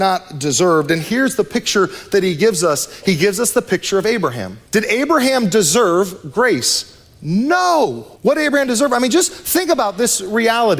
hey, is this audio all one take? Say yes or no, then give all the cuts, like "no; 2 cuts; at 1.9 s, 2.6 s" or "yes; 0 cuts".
no; 2 cuts; at 4.7 s, 8.2 s